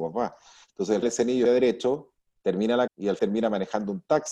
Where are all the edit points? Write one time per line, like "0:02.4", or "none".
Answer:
0:01.0
0:01.5
0:02.9
0:03.2